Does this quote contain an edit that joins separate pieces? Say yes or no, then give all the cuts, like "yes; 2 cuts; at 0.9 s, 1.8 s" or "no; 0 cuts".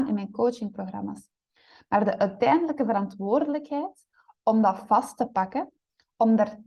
no; 0 cuts